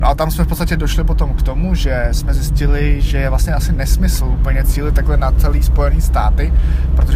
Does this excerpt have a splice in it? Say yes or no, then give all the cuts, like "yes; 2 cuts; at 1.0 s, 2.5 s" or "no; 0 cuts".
no; 0 cuts